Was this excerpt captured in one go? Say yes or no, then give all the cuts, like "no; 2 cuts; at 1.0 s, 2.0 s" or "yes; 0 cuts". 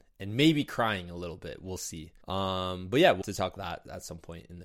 no; 3 cuts; at 2.2 s, 3.2 s, 3.6 s